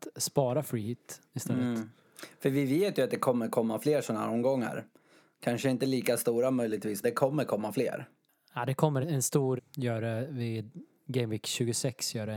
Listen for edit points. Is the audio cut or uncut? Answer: cut